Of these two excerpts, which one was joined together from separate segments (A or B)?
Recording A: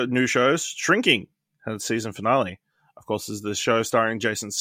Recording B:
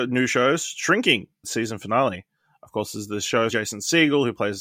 B